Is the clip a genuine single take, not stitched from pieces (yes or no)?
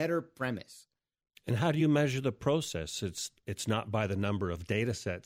yes